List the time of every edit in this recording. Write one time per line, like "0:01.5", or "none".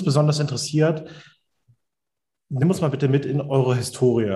none